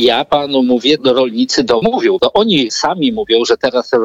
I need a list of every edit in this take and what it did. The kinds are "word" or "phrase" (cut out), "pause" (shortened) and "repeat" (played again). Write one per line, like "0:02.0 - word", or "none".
0:01.0 - word
0:01.8 - word
0:02.2 - word
0:02.7 - word

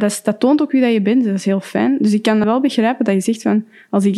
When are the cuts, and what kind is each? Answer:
0:02.4 - word

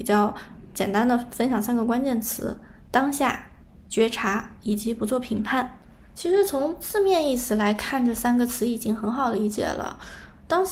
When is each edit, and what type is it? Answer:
none

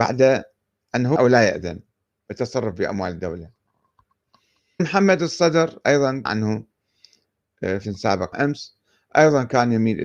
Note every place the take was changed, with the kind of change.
0:01.2 - word
0:04.8 - word
0:06.3 - word
0:07.8 - word
0:08.3 - word

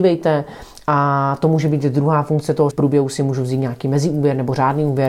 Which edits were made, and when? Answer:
0:02.7 - phrase

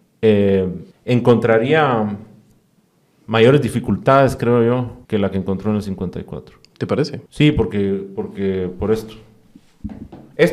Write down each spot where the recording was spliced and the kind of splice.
0:00.9 - pause
0:05.0 - pause
0:07.3 - pause

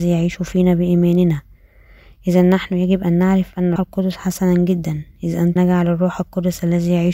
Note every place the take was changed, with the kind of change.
0:03.8 - word
0:05.6 - word

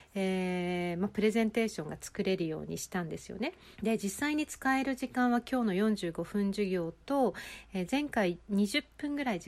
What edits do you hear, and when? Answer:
0:03.7 - pause

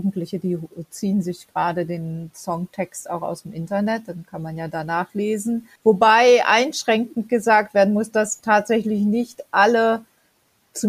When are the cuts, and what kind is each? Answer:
0:05.8 - pause

